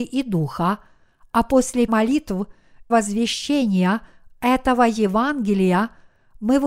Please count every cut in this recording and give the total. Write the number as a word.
two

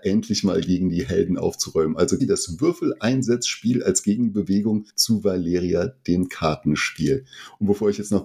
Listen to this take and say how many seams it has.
two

